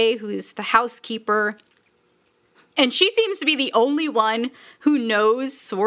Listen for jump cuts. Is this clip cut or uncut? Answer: uncut